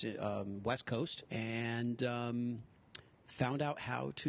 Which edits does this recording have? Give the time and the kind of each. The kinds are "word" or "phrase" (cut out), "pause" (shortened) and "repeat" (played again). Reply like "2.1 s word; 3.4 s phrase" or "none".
1.2 s word